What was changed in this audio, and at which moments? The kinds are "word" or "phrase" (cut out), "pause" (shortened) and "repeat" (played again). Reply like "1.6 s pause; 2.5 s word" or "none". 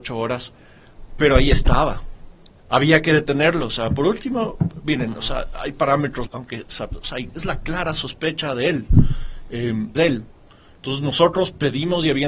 2.6 s pause; 6.3 s phrase; 9.9 s phrase